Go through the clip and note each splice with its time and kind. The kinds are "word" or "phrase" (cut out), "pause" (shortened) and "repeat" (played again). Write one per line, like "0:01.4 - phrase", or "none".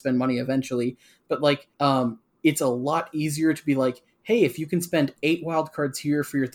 0:01.7 - pause